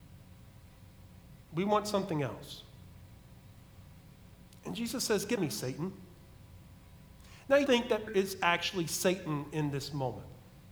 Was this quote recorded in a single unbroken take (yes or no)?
no